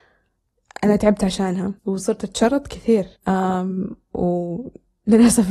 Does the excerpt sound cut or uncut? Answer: cut